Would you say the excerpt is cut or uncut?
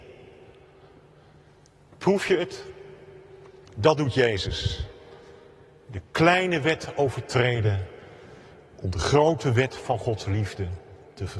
uncut